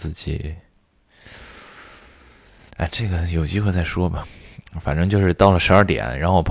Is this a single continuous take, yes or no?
yes